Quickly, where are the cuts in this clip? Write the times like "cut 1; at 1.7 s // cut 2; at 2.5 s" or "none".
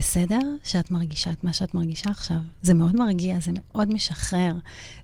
none